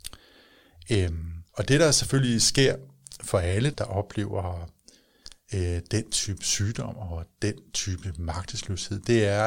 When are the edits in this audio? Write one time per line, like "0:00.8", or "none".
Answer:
0:01.5
0:03.2
0:03.7